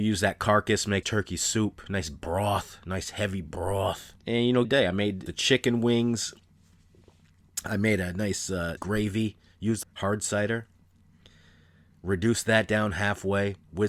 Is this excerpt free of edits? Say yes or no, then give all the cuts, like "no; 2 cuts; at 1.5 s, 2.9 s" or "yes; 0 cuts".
no; 6 cuts; at 1.0 s, 4.2 s, 4.6 s, 5.3 s, 8.8 s, 9.8 s